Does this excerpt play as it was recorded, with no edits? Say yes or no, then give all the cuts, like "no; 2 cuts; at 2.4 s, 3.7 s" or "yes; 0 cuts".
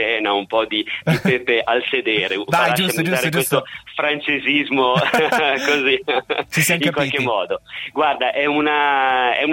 yes; 0 cuts